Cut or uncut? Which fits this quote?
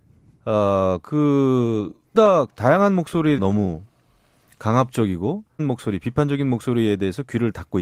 cut